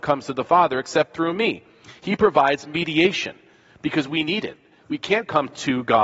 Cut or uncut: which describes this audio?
uncut